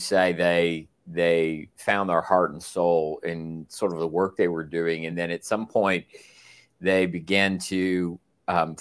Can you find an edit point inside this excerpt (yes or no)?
no